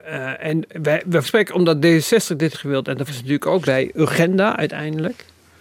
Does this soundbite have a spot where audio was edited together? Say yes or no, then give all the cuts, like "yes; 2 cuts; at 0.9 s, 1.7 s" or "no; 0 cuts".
yes; 4 cuts; at 1.2 s, 2.5 s, 3.1 s, 3.6 s